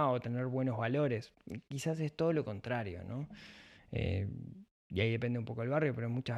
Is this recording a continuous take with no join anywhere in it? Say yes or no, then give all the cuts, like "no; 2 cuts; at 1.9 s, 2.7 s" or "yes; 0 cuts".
yes; 0 cuts